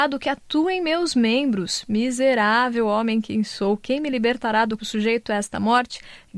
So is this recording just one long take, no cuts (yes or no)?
no